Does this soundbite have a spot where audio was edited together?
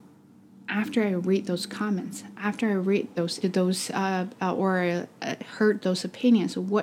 yes; 1 cut; at 3.4 s

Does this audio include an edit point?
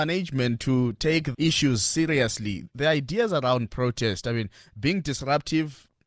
yes; 1 cut; at 1.3 s

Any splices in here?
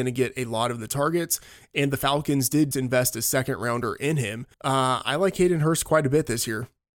yes; 2 cuts; at 2.7 s, 4.5 s

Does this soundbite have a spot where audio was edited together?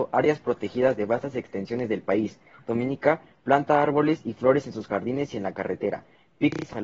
no; 0 cuts

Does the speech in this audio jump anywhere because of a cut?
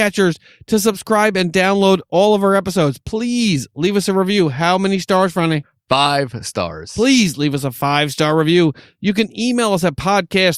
no; 0 cuts

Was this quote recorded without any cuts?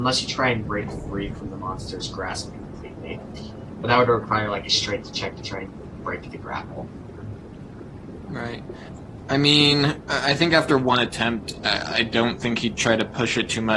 yes; 0 cuts

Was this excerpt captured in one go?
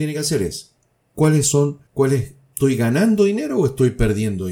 no; 1 cut; at 1.9 s

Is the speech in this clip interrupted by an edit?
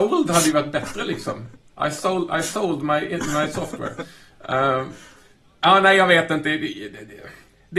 no; 0 cuts

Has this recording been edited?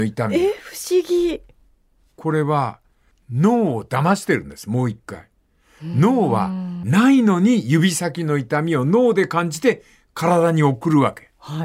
no; 0 cuts

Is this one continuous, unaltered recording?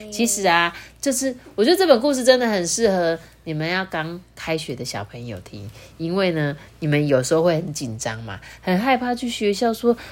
yes; 0 cuts

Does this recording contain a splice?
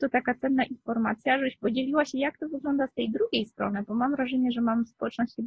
no; 0 cuts

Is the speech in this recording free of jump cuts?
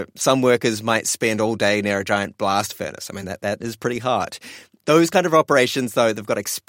yes; 0 cuts

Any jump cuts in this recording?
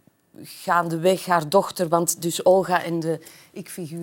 no; 0 cuts

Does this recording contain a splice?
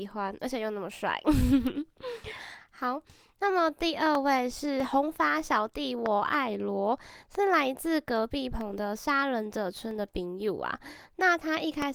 no; 0 cuts

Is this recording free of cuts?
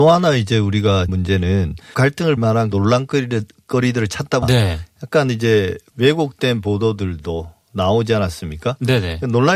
no; 6 cuts; at 1.1 s, 1.9 s, 2.4 s, 2.7 s, 4.4 s, 5.9 s

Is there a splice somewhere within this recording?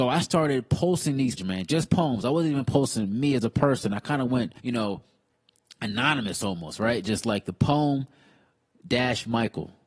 yes; 2 cuts; at 1.4 s, 4.6 s

